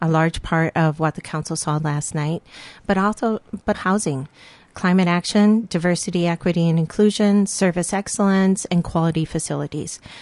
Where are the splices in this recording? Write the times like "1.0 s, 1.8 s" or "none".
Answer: 3.7 s